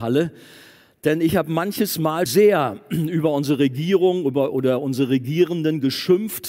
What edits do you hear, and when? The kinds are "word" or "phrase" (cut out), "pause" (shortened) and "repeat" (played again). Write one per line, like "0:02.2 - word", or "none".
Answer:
0:02.3 - word